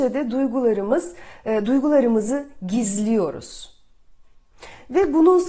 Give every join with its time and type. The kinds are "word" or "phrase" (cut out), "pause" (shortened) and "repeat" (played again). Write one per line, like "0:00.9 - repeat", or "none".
none

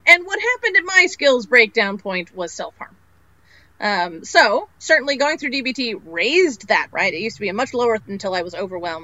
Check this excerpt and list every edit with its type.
0:06.9 - word
0:08.0 - word

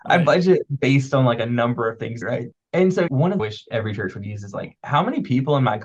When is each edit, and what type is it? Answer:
0:02.2 - phrase
0:03.1 - phrase
0:03.4 - phrase

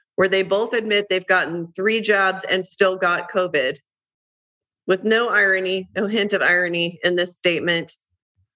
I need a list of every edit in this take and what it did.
none

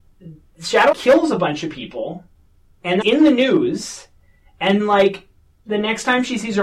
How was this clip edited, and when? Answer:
0:00.9 - word
0:03.0 - word
0:04.8 - word

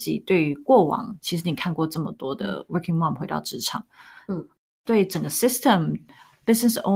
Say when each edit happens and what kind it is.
none

